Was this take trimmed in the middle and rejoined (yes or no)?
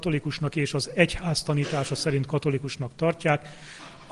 no